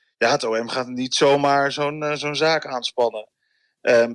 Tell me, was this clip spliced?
no; 0 cuts

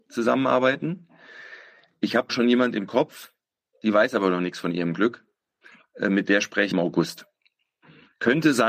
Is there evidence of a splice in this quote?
yes; 2 cuts; at 2.3 s, 6.7 s

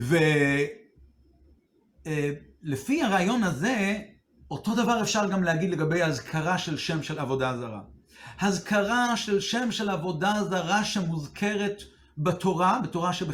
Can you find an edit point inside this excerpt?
no; 0 cuts

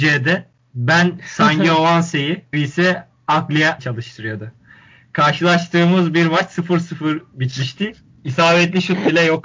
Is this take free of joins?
no; 2 cuts; at 2.5 s, 3.8 s

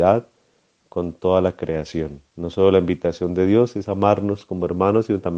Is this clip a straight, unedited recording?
no; 1 cut; at 2.3 s

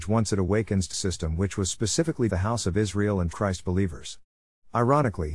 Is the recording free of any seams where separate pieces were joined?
no; 3 cuts; at 0.9 s, 2.3 s, 3.3 s

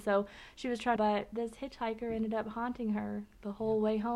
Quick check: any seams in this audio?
yes; 1 cut; at 1.0 s

